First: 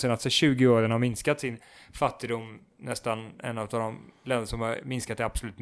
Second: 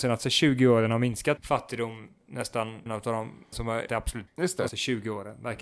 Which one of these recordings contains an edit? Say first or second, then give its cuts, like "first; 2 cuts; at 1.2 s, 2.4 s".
second; 6 cuts; at 1.4 s, 2.9 s, 3.5 s, 3.9 s, 4.3 s, 4.7 s